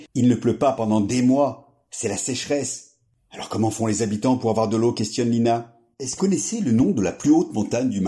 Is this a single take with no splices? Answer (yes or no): no